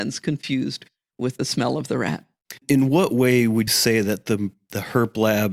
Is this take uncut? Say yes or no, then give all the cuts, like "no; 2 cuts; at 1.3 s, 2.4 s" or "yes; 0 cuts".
no; 2 cuts; at 2.6 s, 3.7 s